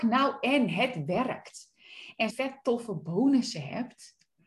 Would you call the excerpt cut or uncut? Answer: cut